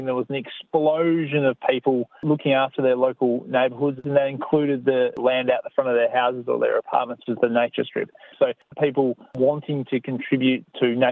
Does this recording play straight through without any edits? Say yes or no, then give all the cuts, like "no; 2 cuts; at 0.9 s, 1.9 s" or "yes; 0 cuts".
no; 2 cuts; at 7.3 s, 8.7 s